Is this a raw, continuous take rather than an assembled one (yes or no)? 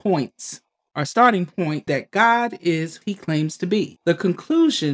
no